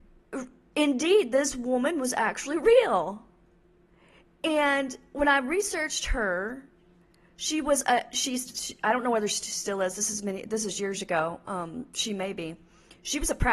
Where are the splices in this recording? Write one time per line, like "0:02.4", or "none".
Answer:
none